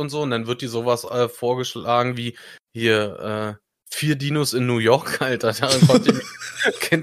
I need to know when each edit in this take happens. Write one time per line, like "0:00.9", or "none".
none